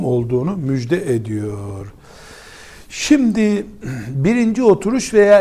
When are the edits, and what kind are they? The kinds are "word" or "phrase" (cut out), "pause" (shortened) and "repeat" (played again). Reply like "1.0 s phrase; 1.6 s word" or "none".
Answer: none